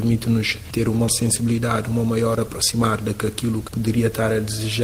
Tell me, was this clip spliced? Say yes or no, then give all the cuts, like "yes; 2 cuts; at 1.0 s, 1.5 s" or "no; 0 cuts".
yes; 2 cuts; at 1.1 s, 3.7 s